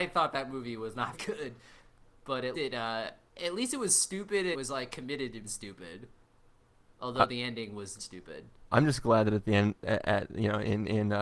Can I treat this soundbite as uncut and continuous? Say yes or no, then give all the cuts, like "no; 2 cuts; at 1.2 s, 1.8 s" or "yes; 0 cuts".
no; 5 cuts; at 1.1 s, 2.5 s, 4.5 s, 5.4 s, 8.0 s